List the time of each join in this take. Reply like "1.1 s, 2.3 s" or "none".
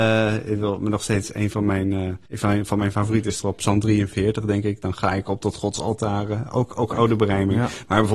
2.2 s, 3.6 s